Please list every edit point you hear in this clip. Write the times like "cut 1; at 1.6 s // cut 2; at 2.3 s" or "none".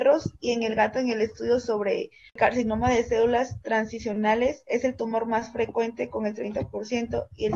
none